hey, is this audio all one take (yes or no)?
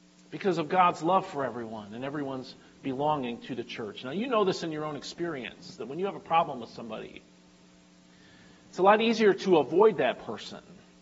yes